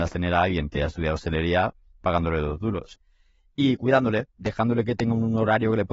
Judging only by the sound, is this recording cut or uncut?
cut